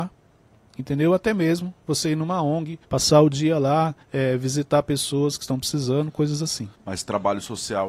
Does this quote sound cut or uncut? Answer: cut